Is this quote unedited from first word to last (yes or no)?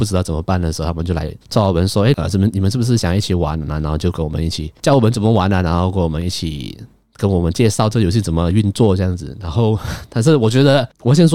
no